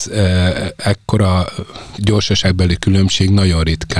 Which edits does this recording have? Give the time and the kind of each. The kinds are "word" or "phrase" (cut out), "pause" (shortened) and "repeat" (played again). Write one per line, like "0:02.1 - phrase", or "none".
0:02.0 - word